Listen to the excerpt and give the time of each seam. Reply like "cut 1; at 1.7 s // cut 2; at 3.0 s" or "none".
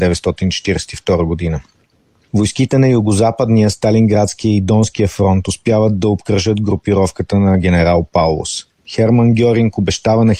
none